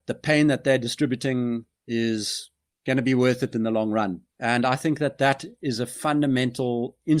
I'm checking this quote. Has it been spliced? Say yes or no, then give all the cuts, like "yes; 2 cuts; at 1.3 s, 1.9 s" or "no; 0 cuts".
yes; 2 cuts; at 1.7 s, 4.3 s